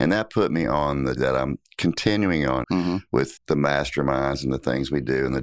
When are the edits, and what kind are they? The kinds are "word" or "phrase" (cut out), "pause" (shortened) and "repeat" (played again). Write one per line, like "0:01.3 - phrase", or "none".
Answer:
0:01.2 - word
0:02.6 - word
0:03.4 - word